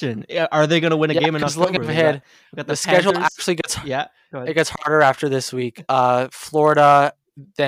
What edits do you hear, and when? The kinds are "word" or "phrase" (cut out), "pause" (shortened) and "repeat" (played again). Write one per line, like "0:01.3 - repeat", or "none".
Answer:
none